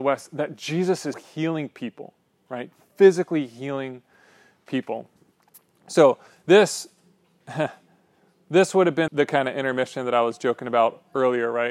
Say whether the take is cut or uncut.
cut